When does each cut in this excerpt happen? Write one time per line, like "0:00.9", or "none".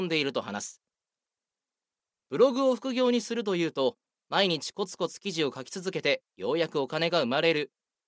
none